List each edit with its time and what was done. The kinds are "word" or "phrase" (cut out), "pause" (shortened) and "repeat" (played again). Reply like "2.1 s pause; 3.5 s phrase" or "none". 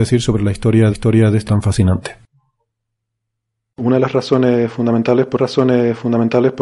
0.9 s repeat; 1.5 s word; 5.4 s repeat